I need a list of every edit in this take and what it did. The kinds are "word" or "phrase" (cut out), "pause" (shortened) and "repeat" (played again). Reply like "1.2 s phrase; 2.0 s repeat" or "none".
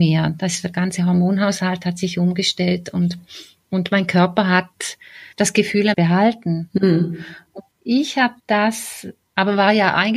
5.3 s pause; 5.9 s phrase; 7.7 s pause; 8.4 s pause